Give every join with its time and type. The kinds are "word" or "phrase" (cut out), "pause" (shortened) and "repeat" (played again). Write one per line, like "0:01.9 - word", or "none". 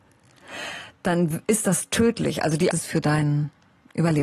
0:02.7 - phrase